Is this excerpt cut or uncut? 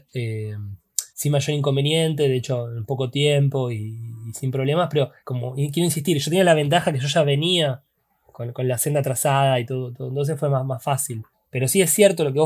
cut